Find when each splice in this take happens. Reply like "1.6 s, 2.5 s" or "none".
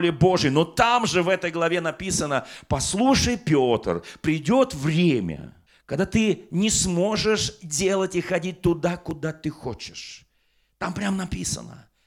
5.7 s